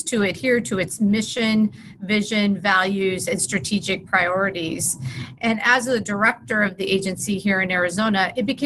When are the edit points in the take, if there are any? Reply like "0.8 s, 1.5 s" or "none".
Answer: none